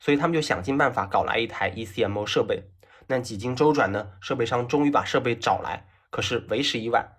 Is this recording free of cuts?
yes; 0 cuts

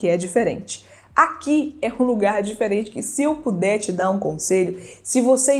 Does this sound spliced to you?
no; 0 cuts

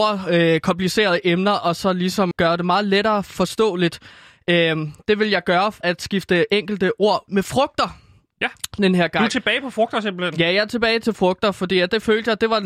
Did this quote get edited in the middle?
yes; 3 cuts; at 2.3 s, 5.8 s, 7.3 s

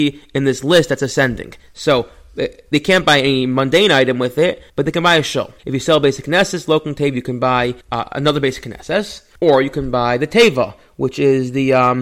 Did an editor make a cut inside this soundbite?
yes; 4 cuts; at 4.7 s, 5.6 s, 7.8 s, 9.4 s

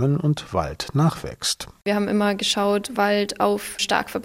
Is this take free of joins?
no; 1 cut; at 2.9 s

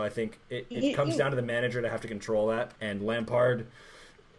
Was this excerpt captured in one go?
no; 1 cut; at 2.8 s

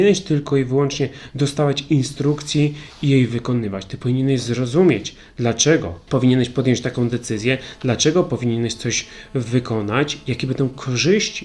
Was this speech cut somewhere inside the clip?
no; 0 cuts

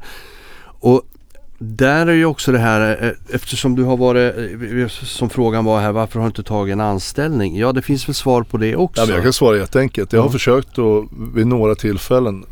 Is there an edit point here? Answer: no; 0 cuts

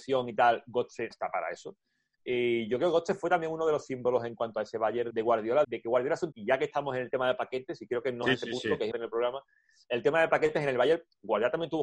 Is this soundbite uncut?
no; 6 cuts; at 1.1 s, 5.1 s, 5.6 s, 6.3 s, 8.2 s, 8.9 s

